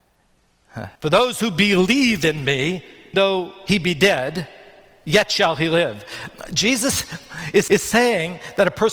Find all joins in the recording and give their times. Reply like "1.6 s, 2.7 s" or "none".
1.0 s, 3.1 s, 7.7 s